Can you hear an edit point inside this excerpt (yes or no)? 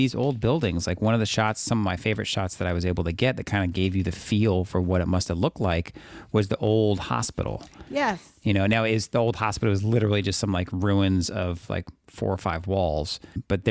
no